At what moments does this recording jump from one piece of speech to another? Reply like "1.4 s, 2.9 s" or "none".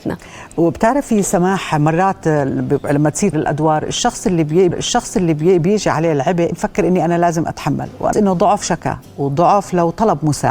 3.3 s, 4.7 s, 6.5 s, 8.1 s, 8.6 s